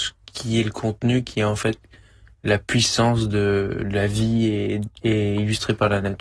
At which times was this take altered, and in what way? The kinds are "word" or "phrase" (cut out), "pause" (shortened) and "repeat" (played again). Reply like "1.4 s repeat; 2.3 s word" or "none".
none